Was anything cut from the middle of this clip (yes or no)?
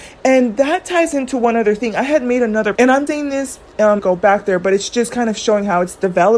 yes